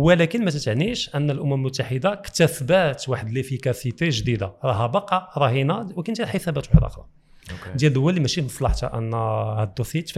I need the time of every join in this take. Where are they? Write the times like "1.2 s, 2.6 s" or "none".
none